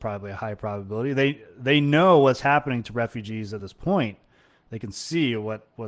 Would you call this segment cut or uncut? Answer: uncut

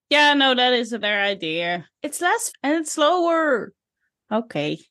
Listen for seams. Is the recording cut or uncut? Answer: cut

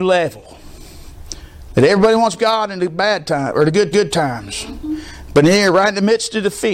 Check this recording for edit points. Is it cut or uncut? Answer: cut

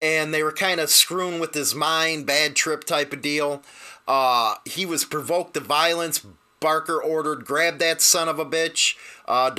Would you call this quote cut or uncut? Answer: uncut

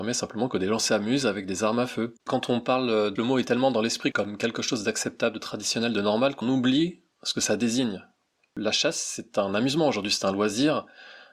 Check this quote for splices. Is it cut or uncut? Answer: cut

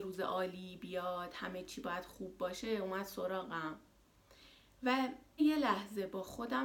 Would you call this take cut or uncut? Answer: cut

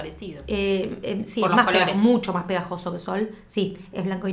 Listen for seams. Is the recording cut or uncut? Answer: uncut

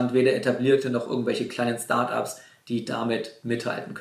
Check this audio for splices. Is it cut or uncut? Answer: uncut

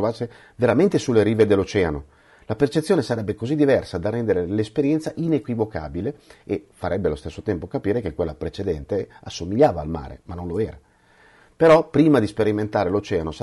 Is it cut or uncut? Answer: uncut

